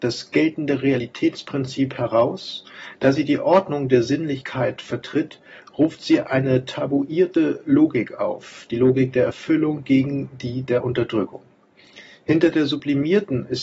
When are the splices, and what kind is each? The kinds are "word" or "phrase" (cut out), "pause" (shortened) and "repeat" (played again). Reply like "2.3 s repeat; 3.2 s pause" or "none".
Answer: none